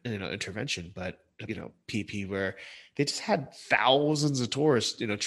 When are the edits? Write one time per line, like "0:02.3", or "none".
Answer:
0:01.5